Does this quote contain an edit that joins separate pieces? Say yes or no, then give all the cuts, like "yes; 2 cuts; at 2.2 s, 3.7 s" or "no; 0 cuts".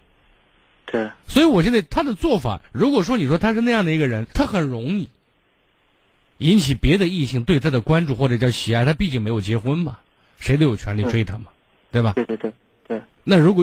yes; 1 cut; at 4.3 s